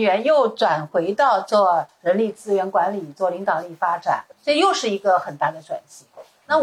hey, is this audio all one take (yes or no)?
no